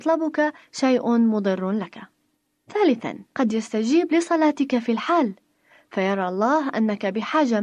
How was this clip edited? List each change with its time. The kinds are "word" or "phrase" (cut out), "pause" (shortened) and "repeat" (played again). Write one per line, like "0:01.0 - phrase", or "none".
0:03.3 - pause

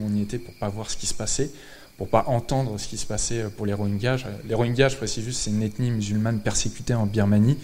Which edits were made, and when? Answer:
none

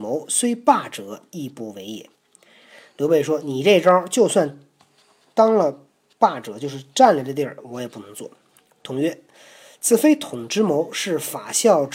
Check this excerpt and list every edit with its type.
none

